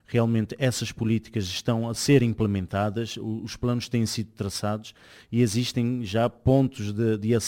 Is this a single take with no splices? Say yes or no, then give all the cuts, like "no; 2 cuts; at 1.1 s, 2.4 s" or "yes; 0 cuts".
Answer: yes; 0 cuts